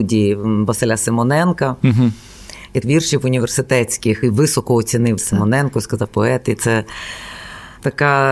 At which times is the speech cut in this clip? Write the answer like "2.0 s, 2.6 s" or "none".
2.8 s, 4.2 s, 5.2 s, 6.1 s